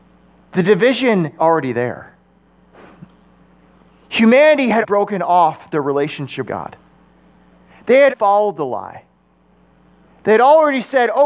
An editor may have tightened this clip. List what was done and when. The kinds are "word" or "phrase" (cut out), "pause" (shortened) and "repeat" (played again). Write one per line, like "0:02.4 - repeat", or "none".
0:01.4 - word
0:04.8 - word
0:06.5 - word
0:08.1 - word